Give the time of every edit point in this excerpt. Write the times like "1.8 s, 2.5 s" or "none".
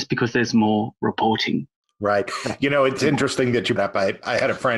1.8 s, 3.0 s, 3.8 s